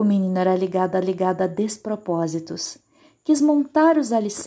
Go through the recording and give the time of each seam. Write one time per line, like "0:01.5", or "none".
0:01.0

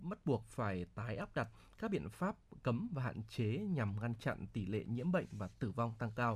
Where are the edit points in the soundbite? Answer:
none

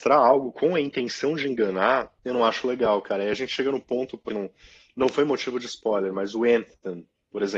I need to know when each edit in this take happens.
0:02.2
0:04.3

